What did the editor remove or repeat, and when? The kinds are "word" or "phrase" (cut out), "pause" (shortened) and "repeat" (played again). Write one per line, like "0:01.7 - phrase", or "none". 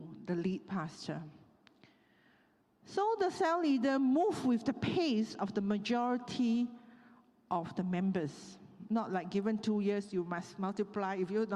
none